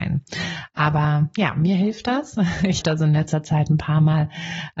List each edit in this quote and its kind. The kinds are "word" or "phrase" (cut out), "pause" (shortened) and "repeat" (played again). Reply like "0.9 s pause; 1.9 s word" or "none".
2.8 s word